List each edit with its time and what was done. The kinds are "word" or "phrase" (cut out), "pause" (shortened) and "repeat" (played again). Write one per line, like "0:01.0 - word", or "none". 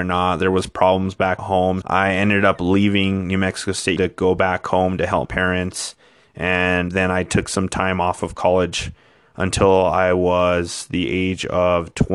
0:01.4 - word
0:01.8 - word
0:04.0 - word
0:05.2 - word
0:06.9 - word